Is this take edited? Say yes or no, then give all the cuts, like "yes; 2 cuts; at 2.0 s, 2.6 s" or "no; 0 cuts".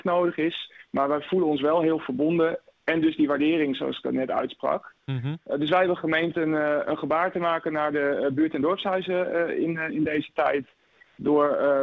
no; 0 cuts